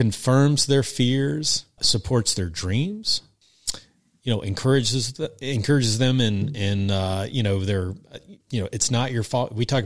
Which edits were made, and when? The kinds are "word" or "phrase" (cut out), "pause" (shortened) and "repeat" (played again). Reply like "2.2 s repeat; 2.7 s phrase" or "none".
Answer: 8.4 s pause